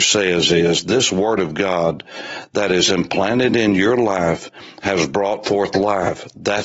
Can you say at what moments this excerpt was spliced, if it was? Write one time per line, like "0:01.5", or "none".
none

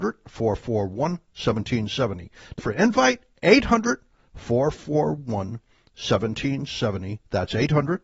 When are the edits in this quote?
0:02.6

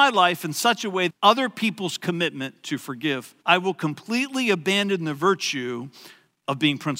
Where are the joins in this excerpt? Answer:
0:01.1
0:03.4

